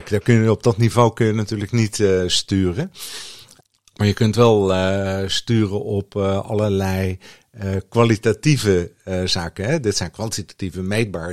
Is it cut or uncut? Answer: uncut